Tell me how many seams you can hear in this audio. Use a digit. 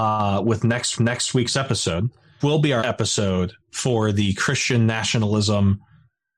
4